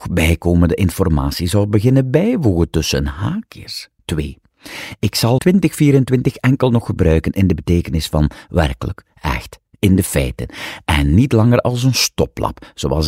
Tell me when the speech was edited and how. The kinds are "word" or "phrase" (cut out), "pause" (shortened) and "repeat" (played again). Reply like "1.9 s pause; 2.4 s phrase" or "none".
4.0 s pause; 5.4 s phrase